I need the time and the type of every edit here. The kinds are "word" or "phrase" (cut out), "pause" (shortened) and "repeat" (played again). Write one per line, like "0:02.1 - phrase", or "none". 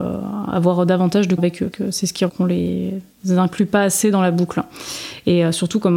0:01.4 - word
0:01.7 - word
0:02.3 - word